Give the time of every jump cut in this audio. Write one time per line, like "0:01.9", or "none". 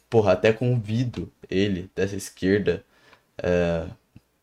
none